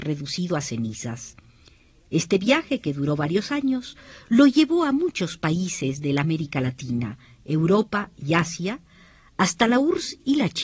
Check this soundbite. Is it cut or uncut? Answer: uncut